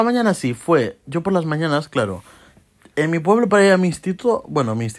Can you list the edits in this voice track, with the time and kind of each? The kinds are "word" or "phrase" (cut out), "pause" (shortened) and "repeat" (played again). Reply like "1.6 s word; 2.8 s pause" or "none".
none